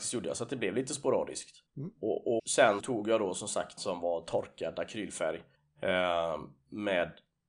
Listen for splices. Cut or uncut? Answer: cut